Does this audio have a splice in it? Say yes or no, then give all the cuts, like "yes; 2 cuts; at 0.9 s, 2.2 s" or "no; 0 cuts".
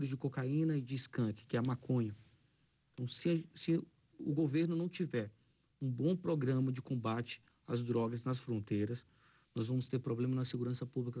no; 0 cuts